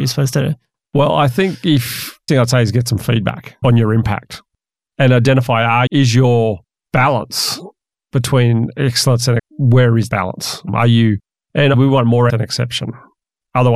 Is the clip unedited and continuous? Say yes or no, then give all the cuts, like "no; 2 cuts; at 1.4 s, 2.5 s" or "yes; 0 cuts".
no; 8 cuts; at 2.3 s, 3.6 s, 5.9 s, 9.4 s, 10.1 s, 10.7 s, 11.7 s, 12.3 s